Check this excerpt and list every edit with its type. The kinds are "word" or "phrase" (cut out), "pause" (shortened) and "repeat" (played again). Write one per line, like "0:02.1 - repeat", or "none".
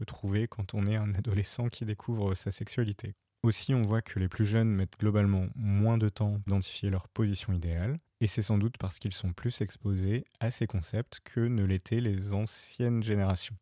0:06.5 - word